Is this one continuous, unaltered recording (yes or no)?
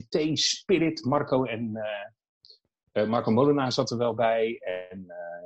yes